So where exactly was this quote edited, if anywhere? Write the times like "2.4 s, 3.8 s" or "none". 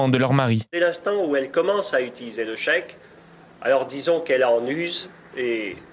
none